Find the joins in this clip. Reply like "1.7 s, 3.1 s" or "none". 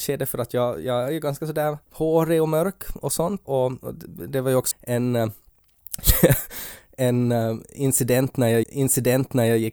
1.8 s, 3.4 s, 4.7 s, 8.6 s